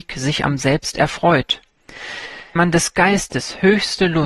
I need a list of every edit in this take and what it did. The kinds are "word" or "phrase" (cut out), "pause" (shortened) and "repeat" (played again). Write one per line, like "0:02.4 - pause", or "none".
0:02.6 - word